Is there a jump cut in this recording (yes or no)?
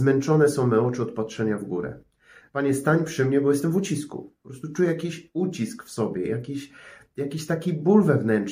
no